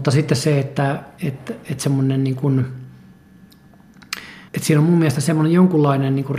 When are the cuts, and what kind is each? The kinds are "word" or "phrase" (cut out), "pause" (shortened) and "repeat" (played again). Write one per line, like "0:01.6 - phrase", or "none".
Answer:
0:01.2 - word
0:04.5 - pause